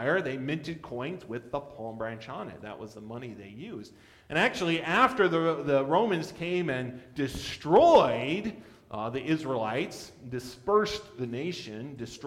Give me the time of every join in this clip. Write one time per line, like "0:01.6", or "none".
none